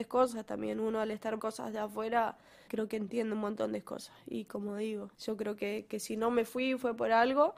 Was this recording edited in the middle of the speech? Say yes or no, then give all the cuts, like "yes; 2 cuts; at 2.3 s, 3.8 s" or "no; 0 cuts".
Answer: yes; 3 cuts; at 1.4 s, 2.7 s, 5.1 s